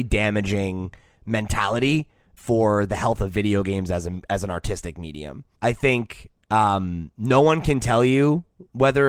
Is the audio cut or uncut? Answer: cut